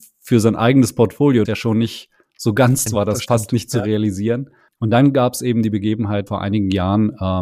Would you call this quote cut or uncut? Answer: cut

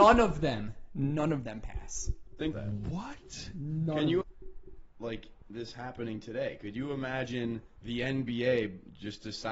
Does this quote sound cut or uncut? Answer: cut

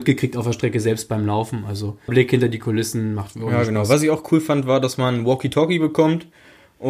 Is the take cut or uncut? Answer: cut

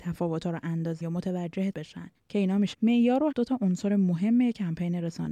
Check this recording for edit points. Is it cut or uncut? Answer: cut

